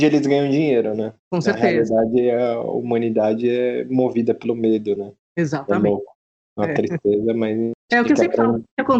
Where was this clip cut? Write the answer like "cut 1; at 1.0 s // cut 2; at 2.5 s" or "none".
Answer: cut 1; at 1.2 s // cut 2; at 7.8 s